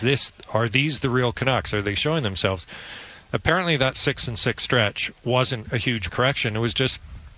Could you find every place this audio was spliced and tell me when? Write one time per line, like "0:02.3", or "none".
0:06.1